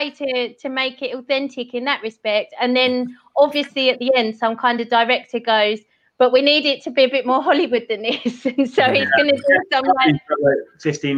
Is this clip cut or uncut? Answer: uncut